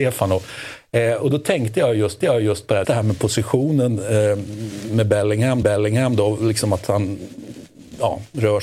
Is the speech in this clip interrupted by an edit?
yes; 3 cuts; at 2.2 s, 2.8 s, 5.6 s

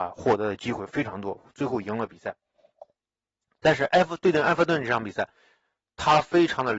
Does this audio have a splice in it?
no; 0 cuts

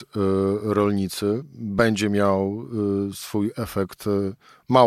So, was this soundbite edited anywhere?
no; 0 cuts

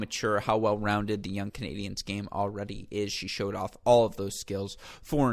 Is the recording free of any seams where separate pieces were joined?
yes; 0 cuts

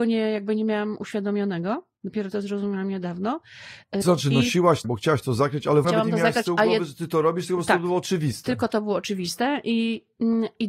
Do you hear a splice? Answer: yes; 3 cuts; at 4.0 s, 4.8 s, 5.8 s

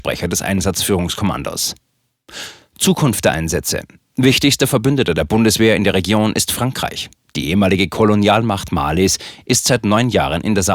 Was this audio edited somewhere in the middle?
no; 0 cuts

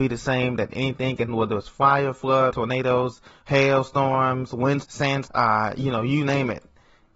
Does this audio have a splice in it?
yes; 4 cuts; at 1.3 s, 2.5 s, 4.8 s, 5.3 s

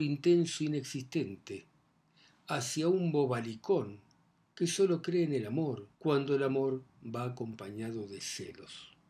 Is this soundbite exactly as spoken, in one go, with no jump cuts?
no; 1 cut; at 5.9 s

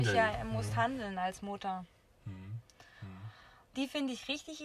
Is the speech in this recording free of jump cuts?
yes; 0 cuts

